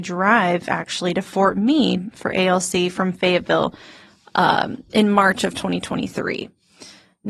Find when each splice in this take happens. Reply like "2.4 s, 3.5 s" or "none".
none